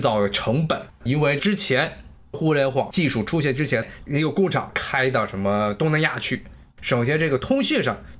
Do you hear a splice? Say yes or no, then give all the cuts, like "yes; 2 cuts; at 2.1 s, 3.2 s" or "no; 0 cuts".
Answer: yes; 1 cut; at 0.9 s